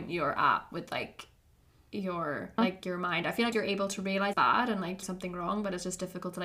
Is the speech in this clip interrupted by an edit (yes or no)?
yes